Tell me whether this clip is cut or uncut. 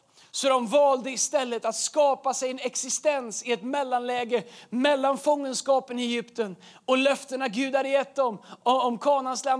uncut